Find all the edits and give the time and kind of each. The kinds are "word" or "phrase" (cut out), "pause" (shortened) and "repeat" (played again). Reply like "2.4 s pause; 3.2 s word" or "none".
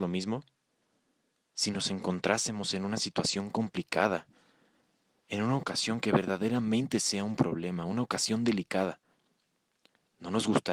none